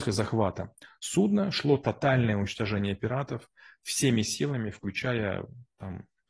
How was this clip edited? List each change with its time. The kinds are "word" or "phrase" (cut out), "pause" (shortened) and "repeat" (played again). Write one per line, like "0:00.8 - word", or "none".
none